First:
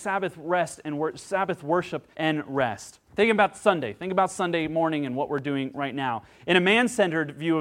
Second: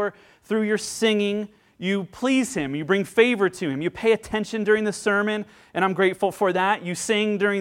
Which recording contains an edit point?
first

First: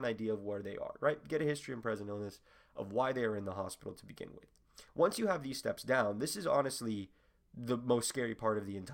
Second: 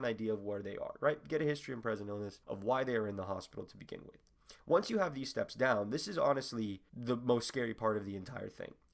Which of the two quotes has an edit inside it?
second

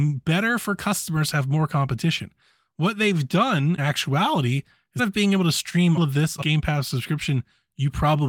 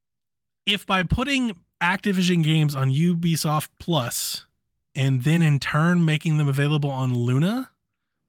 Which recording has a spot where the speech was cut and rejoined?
first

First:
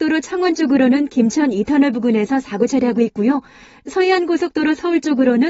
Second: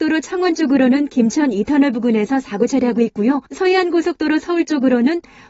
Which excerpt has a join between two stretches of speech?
second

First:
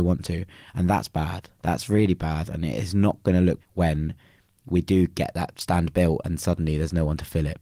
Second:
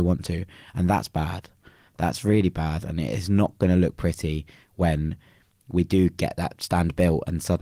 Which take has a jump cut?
first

